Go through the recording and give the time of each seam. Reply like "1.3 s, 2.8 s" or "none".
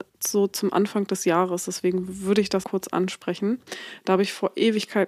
2.6 s